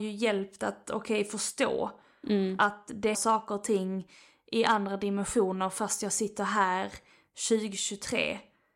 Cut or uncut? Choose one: cut